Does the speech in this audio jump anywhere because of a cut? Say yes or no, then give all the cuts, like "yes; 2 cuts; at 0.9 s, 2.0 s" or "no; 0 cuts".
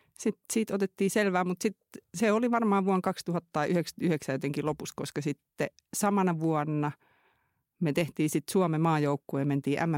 no; 0 cuts